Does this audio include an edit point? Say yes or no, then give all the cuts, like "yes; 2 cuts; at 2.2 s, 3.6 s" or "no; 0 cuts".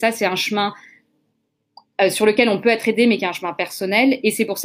no; 0 cuts